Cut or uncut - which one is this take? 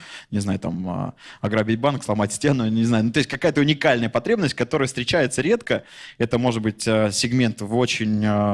uncut